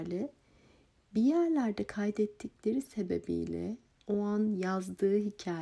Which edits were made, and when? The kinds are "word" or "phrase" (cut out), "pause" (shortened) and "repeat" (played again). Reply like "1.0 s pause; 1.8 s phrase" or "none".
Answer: none

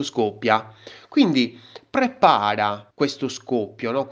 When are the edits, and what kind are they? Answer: 2.9 s pause

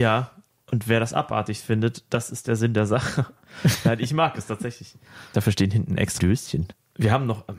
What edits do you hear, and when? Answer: 6.2 s word

